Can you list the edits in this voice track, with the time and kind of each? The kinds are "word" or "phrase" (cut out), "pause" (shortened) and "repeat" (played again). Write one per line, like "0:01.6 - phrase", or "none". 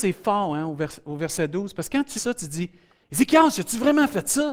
0:02.2 - word